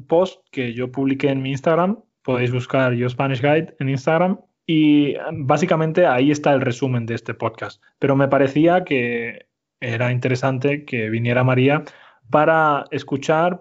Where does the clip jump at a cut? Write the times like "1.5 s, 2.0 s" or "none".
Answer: none